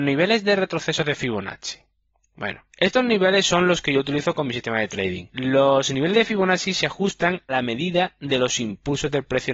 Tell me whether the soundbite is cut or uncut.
cut